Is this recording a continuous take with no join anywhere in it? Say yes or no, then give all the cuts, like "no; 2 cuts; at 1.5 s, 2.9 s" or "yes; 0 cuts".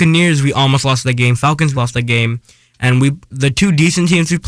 no; 2 cuts; at 1.7 s, 3.3 s